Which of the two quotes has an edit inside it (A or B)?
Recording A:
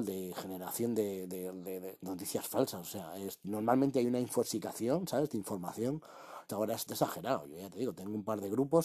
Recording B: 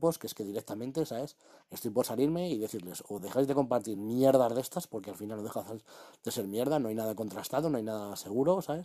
A